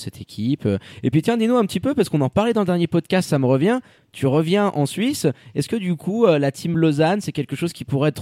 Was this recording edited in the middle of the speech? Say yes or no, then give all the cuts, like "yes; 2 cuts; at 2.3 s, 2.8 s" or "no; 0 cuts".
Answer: no; 0 cuts